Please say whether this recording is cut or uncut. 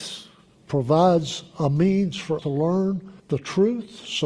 cut